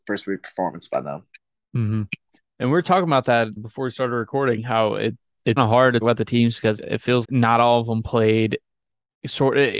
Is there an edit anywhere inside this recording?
yes; 5 cuts; at 3.6 s, 5.6 s, 6.0 s, 6.8 s, 7.2 s

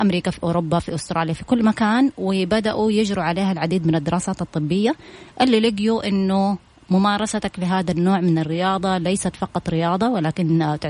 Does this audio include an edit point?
no; 0 cuts

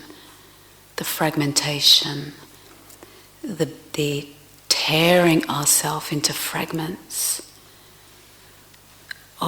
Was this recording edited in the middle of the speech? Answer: no; 0 cuts

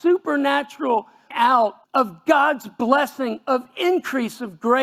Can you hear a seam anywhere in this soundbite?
yes; 2 cuts; at 1.3 s, 1.8 s

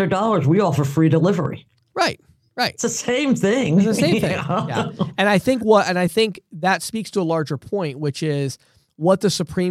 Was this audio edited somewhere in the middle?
no; 0 cuts

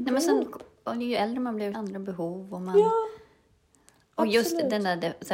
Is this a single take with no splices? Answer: no; 1 cut; at 1.7 s

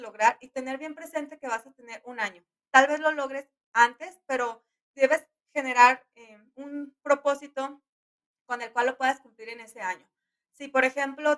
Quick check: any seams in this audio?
no; 0 cuts

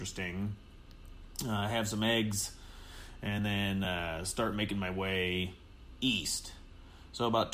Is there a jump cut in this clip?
no; 0 cuts

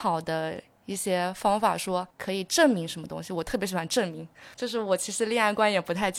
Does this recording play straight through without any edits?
no; 2 cuts; at 2.1 s, 4.5 s

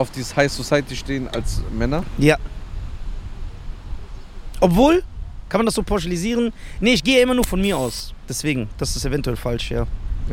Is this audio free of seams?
yes; 0 cuts

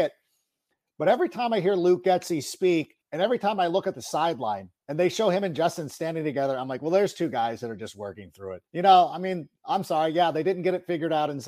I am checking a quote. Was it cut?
yes; 3 cuts; at 3.0 s, 4.8 s, 8.7 s

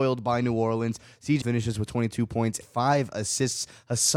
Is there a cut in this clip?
yes; 2 cuts; at 1.4 s, 2.6 s

